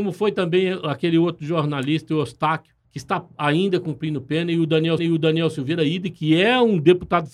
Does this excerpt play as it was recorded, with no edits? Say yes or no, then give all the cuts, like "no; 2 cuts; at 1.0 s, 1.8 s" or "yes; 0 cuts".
no; 2 cuts; at 2.8 s, 5.0 s